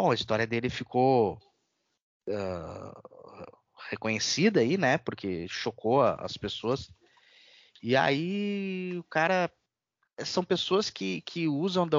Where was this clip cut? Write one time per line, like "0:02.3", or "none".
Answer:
none

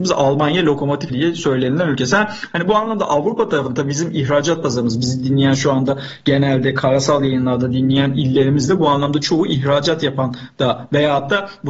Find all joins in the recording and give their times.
0:01.1

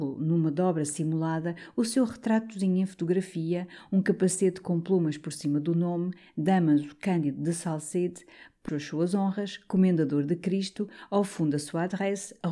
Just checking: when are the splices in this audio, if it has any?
0:08.7

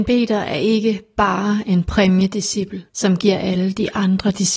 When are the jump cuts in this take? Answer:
0:02.9

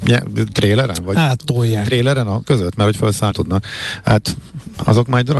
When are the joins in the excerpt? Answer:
0:02.4
0:03.3

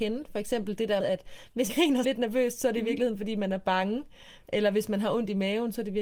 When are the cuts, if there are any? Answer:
0:01.0
0:01.7
0:02.0

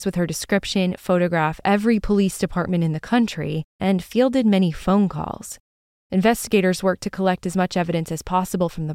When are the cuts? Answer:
0:01.6

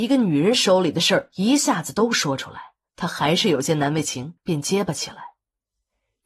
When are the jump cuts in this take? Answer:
0:04.4

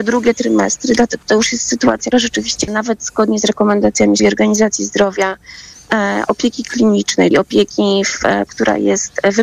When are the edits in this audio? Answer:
0:01.2
0:02.1
0:02.7
0:04.2
0:07.3
0:08.5

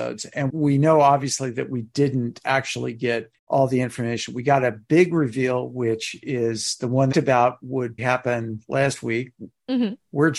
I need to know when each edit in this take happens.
0:03.4
0:07.1
0:08.0

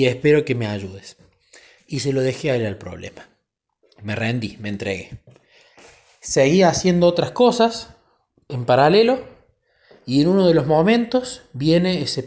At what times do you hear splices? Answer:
none

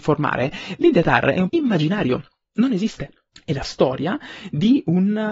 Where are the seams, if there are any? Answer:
0:01.5
0:03.3
0:03.6

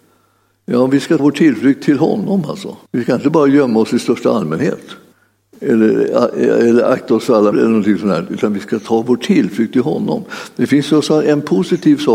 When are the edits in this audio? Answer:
0:01.2
0:02.9
0:05.1
0:07.5

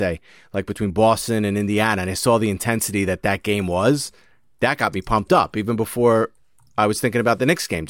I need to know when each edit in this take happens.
none

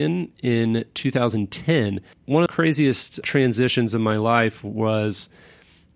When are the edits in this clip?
0:02.5
0:03.2

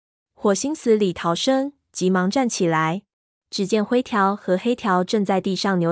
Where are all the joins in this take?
0:03.2

